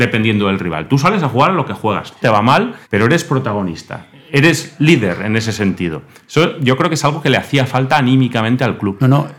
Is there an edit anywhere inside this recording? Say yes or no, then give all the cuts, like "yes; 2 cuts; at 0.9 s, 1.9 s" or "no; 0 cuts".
yes; 2 cuts; at 2.2 s, 2.8 s